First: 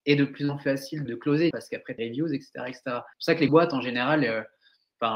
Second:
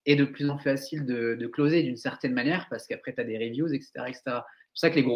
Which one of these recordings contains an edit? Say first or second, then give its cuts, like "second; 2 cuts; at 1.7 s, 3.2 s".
first; 5 cuts; at 1.1 s, 1.5 s, 2.0 s, 3.1 s, 3.5 s